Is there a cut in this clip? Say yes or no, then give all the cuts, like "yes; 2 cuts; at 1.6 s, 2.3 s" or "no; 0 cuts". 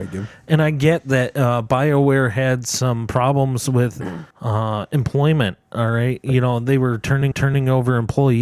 yes; 2 cuts; at 4.3 s, 7.3 s